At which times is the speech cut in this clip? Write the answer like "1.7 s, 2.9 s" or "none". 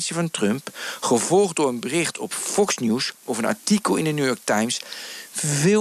none